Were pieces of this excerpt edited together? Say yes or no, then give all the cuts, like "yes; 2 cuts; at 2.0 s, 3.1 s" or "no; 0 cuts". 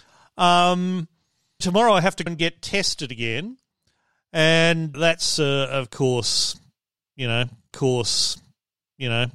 yes; 4 cuts; at 1.6 s, 2.3 s, 4.9 s, 7.7 s